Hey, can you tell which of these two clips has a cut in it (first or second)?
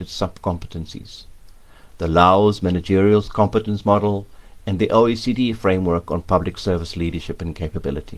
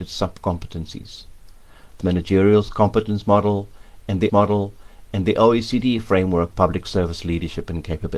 second